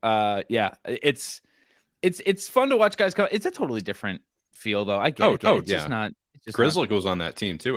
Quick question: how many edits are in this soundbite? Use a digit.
1